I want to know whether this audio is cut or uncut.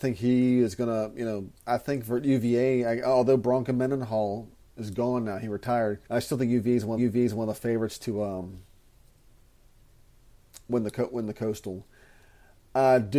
cut